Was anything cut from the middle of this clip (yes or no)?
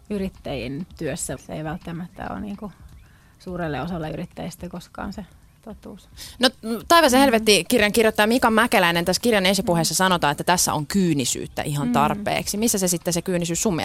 yes